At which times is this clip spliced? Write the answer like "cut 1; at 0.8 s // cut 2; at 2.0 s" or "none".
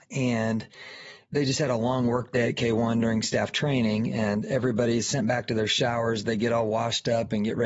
none

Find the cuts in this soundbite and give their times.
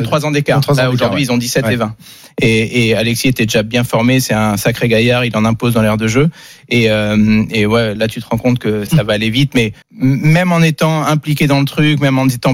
cut 1; at 8.0 s // cut 2; at 8.9 s // cut 3; at 9.8 s

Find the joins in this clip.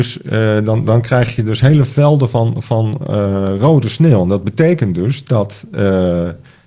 none

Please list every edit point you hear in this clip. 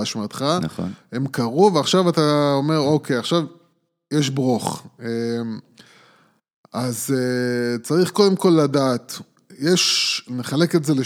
none

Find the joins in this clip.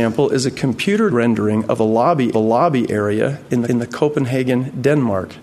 cut 1; at 1.1 s // cut 2; at 2.3 s // cut 3; at 3.6 s

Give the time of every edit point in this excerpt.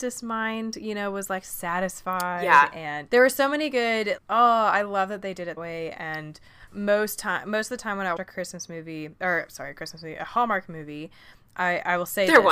cut 1; at 3.1 s // cut 2; at 4.2 s // cut 3; at 5.6 s // cut 4; at 6.7 s // cut 5; at 8.2 s

